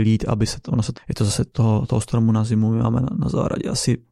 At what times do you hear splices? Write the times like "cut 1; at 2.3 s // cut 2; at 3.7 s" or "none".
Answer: cut 1; at 1.0 s // cut 2; at 1.5 s